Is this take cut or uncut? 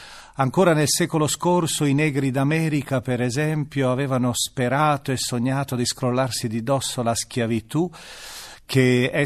uncut